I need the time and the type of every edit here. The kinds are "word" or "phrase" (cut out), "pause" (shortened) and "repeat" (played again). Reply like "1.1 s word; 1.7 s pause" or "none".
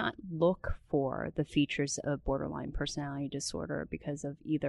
none

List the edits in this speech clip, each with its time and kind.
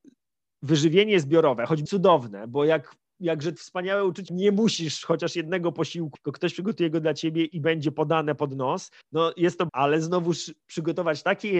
1.9 s word; 3.6 s word; 4.3 s word; 6.1 s word; 9.0 s pause; 9.7 s word

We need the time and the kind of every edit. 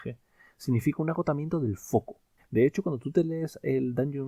2.4 s pause

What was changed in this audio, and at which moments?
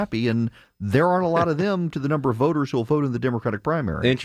1.9 s word

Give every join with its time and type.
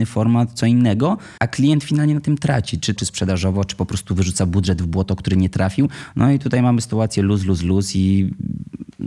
1.4 s pause; 3.0 s phrase

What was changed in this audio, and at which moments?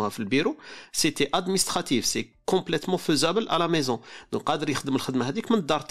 none

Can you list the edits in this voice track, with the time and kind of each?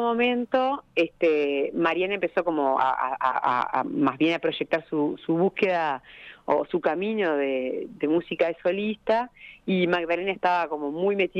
none

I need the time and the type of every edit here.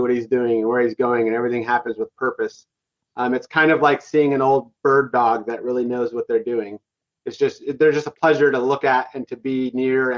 none

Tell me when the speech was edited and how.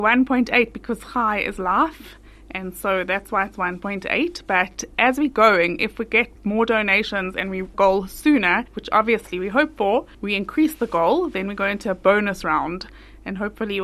6.4 s pause; 7.7 s phrase; 8.7 s pause; 10.1 s pause

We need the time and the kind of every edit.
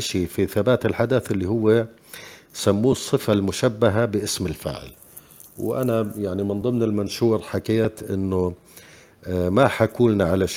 none

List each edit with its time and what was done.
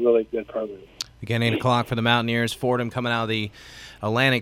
none

